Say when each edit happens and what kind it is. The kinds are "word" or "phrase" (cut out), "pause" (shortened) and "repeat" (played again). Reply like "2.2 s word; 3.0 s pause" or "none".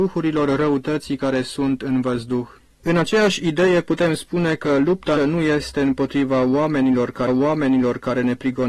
2.6 s pause; 5.2 s word; 7.3 s repeat